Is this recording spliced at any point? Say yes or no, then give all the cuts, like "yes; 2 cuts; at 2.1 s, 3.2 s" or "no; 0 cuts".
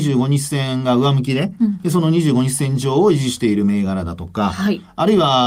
no; 0 cuts